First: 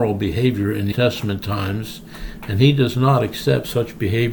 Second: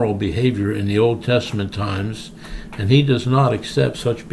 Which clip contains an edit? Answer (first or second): first